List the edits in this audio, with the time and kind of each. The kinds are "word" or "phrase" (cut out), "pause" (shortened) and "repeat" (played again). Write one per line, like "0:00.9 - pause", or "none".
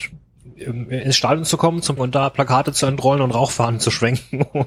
0:02.0 - word